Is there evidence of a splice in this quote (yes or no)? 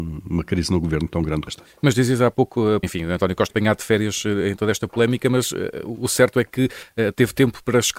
yes